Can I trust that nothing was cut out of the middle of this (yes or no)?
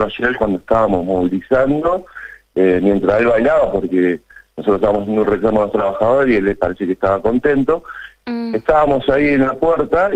yes